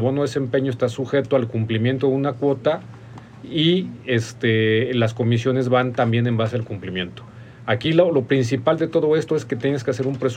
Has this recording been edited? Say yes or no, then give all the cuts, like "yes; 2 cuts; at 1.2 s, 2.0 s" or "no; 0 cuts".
no; 0 cuts